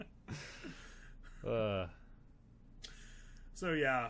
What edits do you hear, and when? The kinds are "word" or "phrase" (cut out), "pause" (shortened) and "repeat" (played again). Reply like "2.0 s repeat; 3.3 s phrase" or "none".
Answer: none